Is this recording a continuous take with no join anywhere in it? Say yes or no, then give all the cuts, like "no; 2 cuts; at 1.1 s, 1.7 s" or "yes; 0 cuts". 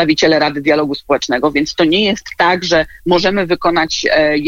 yes; 0 cuts